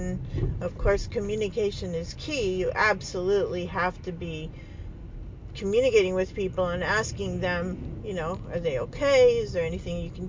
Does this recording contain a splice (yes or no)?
no